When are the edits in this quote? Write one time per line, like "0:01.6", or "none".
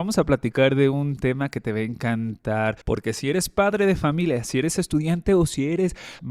0:02.8